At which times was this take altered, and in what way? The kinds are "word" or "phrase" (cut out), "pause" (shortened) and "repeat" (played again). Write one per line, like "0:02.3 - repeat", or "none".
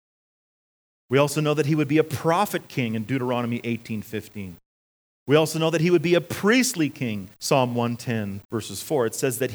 0:04.8 - pause
0:07.3 - pause
0:08.4 - pause